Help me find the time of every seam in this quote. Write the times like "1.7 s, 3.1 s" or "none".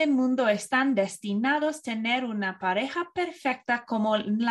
none